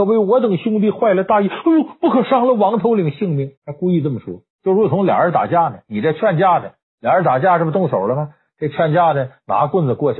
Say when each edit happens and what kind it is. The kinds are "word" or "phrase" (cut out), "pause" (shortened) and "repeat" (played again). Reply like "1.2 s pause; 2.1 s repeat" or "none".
3.6 s pause; 4.5 s pause; 6.8 s pause